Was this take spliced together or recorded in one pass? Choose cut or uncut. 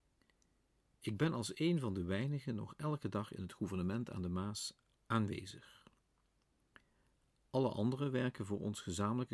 uncut